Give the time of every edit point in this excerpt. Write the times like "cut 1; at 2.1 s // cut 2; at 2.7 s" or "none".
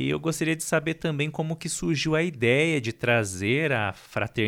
none